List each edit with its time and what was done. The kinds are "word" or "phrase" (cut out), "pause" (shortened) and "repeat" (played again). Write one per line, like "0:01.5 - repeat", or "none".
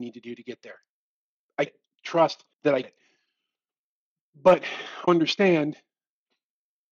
0:01.7 - word
0:02.5 - pause
0:02.8 - word
0:05.1 - word